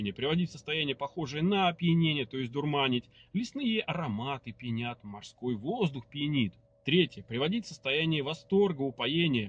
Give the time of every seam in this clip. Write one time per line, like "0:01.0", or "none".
0:06.6